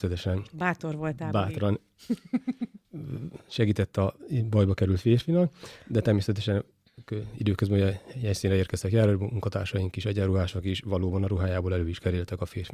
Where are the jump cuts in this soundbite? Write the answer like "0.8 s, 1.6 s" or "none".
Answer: 2.8 s